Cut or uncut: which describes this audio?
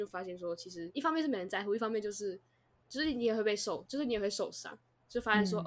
uncut